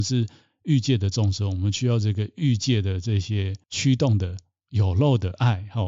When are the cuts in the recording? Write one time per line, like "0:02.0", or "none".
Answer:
none